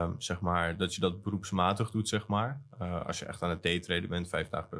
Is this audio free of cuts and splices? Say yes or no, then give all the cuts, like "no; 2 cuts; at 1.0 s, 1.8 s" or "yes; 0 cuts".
yes; 0 cuts